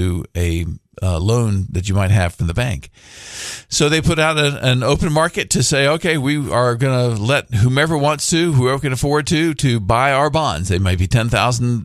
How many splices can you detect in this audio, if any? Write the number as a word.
zero